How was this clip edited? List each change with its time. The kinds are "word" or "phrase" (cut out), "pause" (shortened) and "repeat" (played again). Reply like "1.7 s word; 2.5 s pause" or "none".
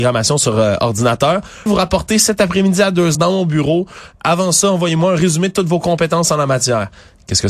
1.7 s word; 3.1 s word

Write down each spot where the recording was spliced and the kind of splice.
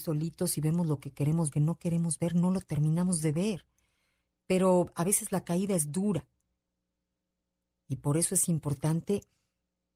1.5 s phrase

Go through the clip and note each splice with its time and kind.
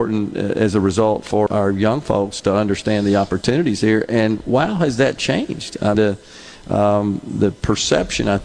1.5 s word; 5.9 s word

